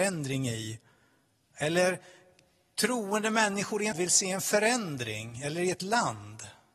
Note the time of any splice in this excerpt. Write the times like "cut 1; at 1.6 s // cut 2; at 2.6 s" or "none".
cut 1; at 3.9 s